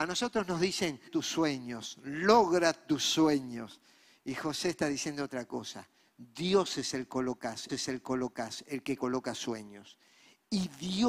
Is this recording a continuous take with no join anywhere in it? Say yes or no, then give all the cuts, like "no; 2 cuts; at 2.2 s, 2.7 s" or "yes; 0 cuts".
no; 2 cuts; at 1.1 s, 7.7 s